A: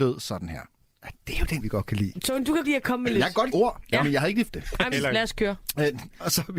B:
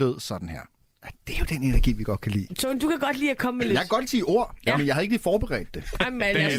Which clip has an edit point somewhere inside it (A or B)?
A